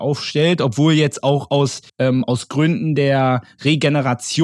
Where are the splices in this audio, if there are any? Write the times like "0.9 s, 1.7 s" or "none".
1.9 s